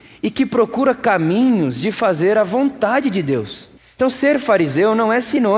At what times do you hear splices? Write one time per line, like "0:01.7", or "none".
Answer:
0:03.8